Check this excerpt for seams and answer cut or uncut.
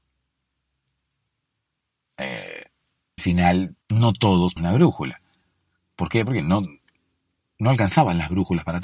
cut